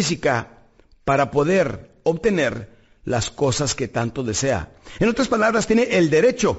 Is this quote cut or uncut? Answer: uncut